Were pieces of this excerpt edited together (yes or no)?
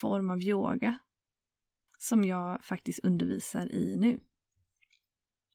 no